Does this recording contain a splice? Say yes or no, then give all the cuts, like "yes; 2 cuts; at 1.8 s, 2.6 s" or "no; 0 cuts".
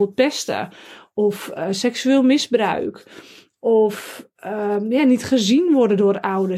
no; 0 cuts